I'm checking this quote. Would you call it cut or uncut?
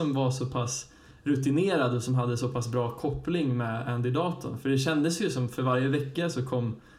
uncut